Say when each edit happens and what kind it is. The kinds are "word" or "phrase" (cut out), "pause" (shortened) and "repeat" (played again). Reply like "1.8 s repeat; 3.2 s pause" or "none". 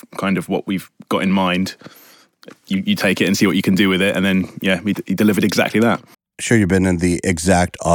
6.1 s pause

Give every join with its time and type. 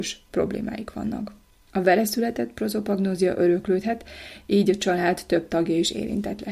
none

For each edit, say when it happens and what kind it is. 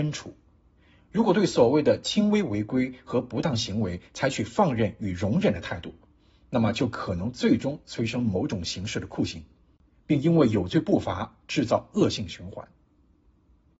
none

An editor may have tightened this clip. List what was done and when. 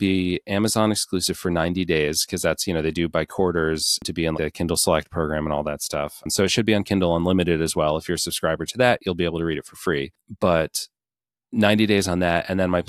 4.3 s word

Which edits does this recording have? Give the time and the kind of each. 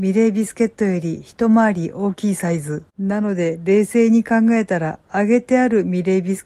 2.9 s pause

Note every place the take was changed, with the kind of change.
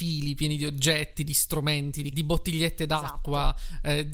2.1 s word

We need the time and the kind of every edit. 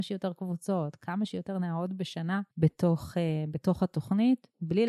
2.5 s pause

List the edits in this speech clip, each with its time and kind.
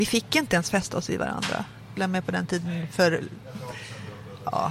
2.0 s phrase

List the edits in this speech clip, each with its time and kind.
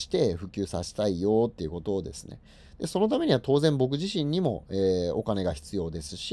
none

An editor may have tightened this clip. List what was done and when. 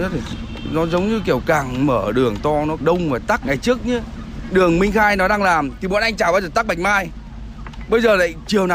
2.8 s word; 3.4 s word

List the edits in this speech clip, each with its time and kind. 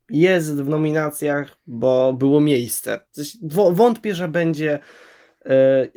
3.0 s pause

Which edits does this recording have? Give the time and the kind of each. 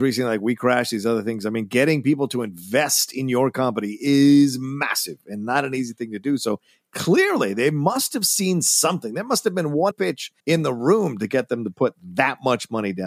9.9 s word; 10.4 s pause

